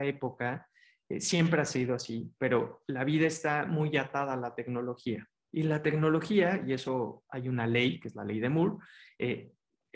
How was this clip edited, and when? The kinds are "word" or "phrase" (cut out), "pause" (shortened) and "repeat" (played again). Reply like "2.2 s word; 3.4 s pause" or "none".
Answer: none